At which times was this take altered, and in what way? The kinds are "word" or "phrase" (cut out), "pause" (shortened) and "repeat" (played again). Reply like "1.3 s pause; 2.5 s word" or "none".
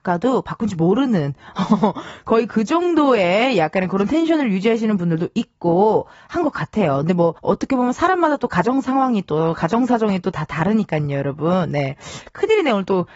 7.4 s pause